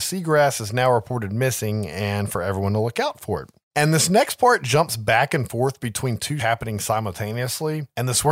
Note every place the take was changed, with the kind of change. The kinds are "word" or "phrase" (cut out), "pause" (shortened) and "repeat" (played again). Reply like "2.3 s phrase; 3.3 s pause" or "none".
6.4 s word